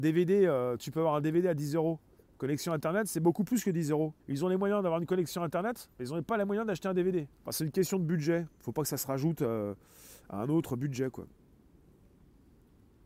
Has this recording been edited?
yes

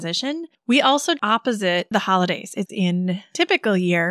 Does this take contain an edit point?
yes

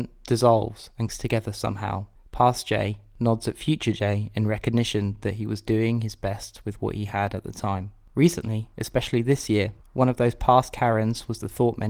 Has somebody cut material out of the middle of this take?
yes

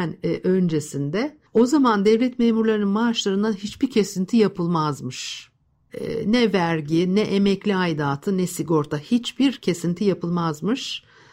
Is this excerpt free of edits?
no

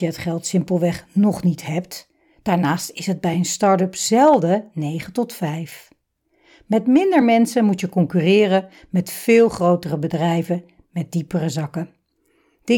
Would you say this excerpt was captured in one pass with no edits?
yes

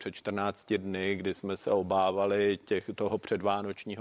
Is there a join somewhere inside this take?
no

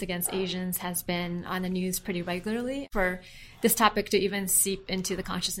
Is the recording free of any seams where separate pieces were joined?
yes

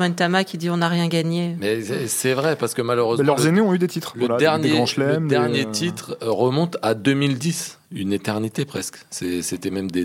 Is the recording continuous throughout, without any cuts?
yes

